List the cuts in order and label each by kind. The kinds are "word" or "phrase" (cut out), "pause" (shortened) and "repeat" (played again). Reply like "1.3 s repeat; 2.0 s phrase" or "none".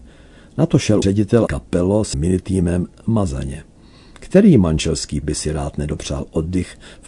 1.0 s word; 1.5 s word; 2.1 s word; 5.2 s word